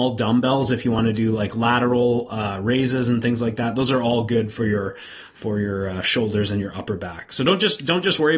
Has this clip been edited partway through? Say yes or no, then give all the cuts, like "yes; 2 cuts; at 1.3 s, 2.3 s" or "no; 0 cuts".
no; 0 cuts